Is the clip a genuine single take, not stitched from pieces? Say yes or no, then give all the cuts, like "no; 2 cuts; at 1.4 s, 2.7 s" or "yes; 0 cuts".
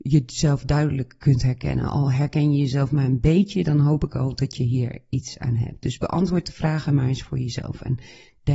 yes; 0 cuts